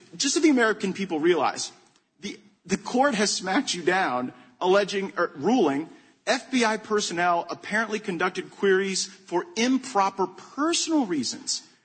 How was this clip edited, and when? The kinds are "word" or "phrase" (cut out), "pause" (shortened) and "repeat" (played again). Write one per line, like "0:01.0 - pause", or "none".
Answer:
none